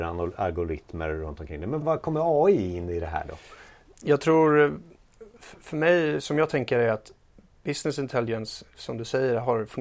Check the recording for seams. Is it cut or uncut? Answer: cut